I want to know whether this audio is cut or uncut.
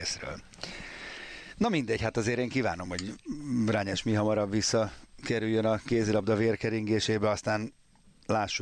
uncut